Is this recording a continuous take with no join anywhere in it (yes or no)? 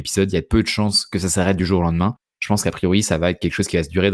yes